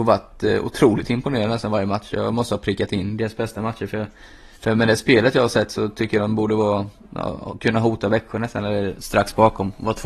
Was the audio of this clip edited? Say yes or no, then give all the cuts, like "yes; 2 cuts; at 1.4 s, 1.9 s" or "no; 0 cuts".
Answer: yes; 1 cut; at 4.6 s